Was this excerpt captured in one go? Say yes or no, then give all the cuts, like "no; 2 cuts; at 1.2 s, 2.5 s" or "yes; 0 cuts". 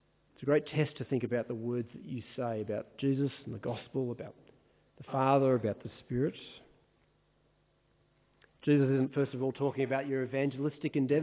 yes; 0 cuts